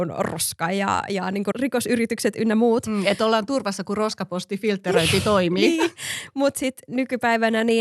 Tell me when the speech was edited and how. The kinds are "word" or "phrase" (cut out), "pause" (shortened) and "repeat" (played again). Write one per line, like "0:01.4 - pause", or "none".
0:01.5 - phrase